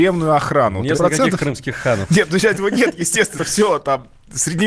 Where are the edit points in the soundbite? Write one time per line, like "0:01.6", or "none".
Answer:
0:00.9
0:02.5
0:03.4